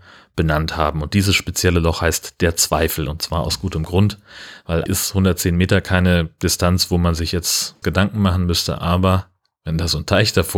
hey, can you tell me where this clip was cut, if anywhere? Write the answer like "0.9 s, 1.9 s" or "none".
4.9 s, 7.8 s